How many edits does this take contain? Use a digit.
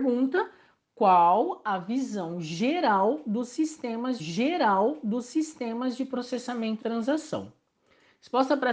2